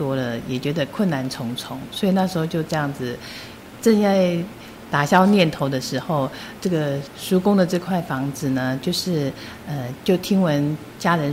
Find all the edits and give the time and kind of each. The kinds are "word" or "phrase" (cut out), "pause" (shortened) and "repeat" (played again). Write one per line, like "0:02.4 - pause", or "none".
0:03.8 - word
0:06.6 - word

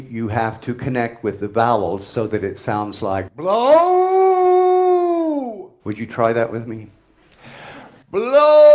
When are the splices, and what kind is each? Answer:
0:05.8 - pause

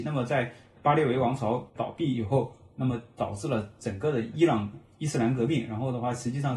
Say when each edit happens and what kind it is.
0:01.7 - pause

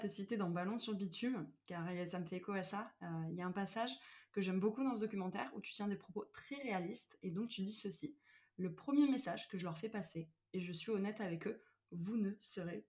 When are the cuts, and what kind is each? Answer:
none

